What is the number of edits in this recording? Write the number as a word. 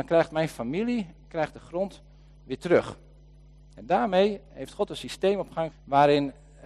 one